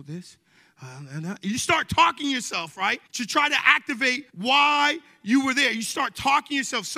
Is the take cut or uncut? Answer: cut